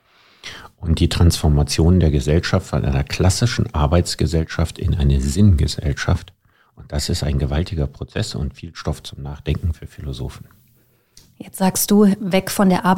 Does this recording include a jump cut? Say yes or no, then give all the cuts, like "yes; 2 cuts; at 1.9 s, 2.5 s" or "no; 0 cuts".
no; 0 cuts